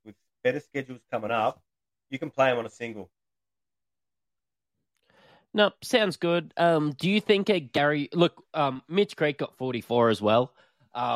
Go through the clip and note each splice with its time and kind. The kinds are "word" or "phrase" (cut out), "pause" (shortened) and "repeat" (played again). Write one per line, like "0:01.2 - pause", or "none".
none